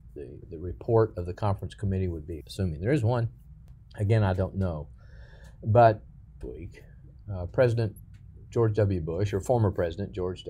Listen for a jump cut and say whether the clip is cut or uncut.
cut